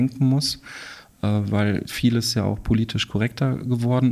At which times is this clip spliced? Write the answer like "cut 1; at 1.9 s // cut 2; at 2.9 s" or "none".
none